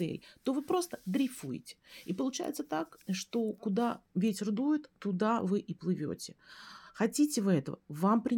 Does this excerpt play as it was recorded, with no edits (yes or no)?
no